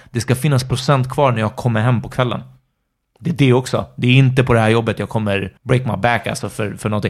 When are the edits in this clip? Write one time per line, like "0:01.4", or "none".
0:05.6